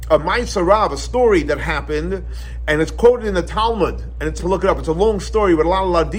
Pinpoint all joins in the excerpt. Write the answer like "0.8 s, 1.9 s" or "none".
4.4 s